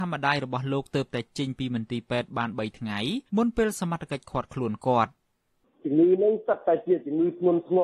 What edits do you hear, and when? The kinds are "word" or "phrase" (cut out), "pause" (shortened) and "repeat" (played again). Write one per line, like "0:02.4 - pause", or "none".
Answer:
0:03.3 - pause